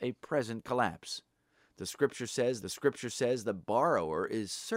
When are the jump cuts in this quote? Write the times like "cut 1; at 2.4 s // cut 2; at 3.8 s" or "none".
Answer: cut 1; at 2.6 s